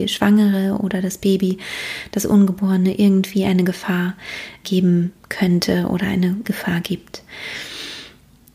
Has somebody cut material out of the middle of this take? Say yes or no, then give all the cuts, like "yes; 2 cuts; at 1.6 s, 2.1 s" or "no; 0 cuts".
yes; 3 cuts; at 4.6 s, 5.2 s, 6.4 s